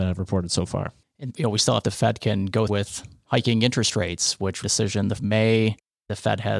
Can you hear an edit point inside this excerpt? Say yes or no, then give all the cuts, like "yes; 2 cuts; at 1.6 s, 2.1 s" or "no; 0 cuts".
yes; 5 cuts; at 1.3 s, 1.8 s, 2.7 s, 4.6 s, 5.2 s